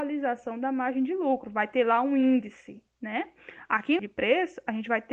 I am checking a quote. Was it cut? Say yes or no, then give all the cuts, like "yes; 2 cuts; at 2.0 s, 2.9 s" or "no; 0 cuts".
yes; 2 cuts; at 2.9 s, 4.0 s